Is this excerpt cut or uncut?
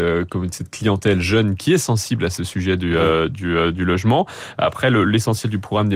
uncut